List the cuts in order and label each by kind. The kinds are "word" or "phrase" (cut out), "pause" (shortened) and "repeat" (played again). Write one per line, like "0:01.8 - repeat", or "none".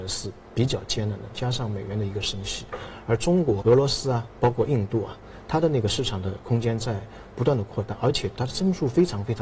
0:03.6 - word